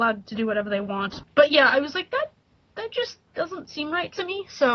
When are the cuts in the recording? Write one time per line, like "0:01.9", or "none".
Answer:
none